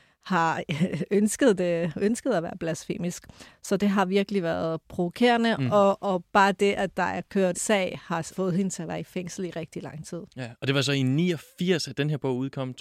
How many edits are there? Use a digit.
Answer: 3